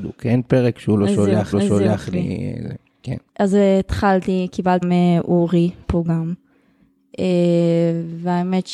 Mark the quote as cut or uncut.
cut